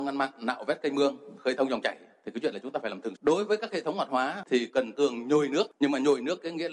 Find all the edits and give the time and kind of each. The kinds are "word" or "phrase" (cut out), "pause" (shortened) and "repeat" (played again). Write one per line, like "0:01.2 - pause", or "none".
0:02.5 - word
0:03.1 - word
0:04.9 - word

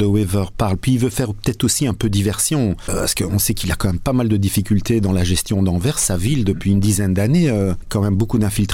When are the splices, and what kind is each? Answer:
none

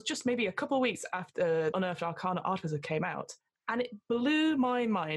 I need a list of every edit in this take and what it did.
0:01.7 - word

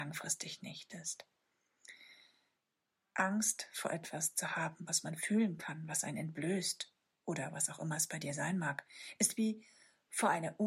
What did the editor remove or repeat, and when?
none

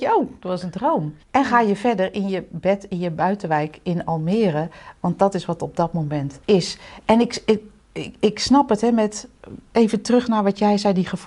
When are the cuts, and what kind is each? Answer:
0:01.2 - pause
0:06.4 - pause

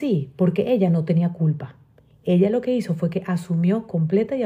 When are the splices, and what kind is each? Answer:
none

